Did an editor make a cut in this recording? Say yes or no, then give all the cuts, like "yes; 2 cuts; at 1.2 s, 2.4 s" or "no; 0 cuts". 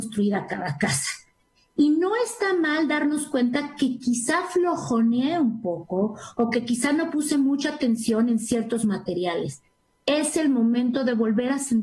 no; 0 cuts